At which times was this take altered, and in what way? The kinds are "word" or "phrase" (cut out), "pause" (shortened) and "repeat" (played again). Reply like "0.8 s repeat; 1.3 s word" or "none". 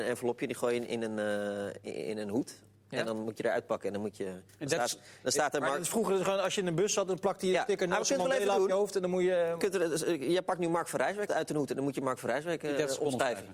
11.3 s word